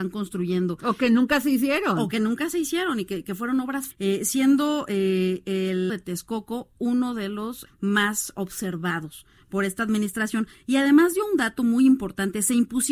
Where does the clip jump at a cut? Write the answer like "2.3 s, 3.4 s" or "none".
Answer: 3.9 s, 5.9 s, 7.7 s